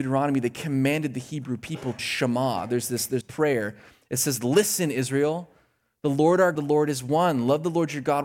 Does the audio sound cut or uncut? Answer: cut